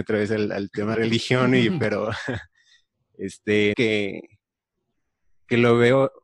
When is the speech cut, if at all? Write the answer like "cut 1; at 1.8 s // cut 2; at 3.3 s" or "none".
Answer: cut 1; at 0.9 s // cut 2; at 3.7 s